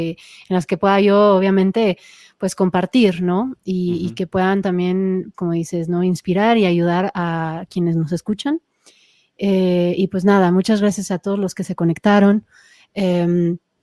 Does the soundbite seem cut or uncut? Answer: cut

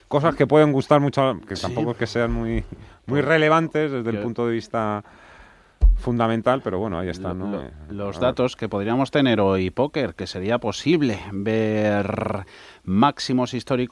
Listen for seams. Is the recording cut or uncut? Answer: uncut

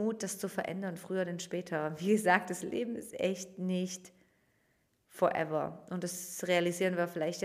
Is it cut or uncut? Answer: uncut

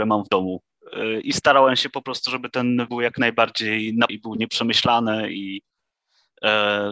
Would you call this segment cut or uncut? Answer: cut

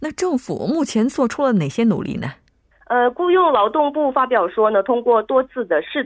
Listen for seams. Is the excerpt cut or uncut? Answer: cut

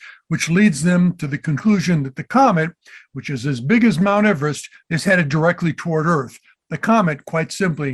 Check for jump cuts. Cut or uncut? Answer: uncut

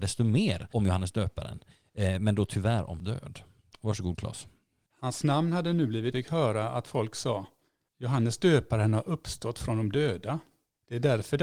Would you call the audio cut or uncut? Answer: cut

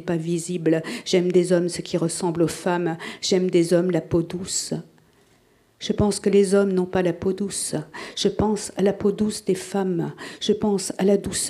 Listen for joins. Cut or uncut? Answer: uncut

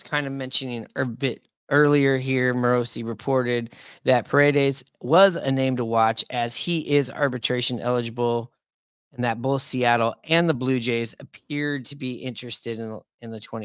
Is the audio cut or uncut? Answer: uncut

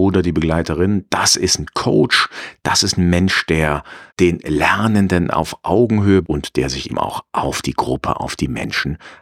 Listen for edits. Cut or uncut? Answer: cut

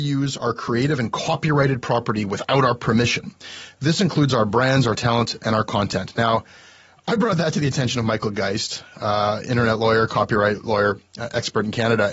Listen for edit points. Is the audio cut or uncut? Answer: uncut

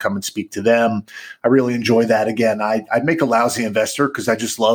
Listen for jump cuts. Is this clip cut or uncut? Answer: uncut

